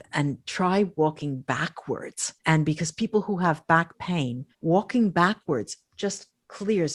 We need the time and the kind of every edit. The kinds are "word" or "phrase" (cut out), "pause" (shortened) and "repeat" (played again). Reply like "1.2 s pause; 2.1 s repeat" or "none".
2.4 s pause; 4.5 s pause